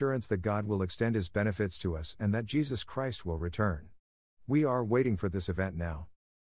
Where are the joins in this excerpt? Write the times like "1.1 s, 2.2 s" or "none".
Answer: none